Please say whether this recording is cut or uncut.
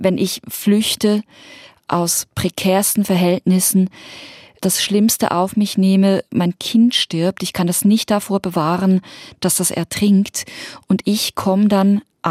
uncut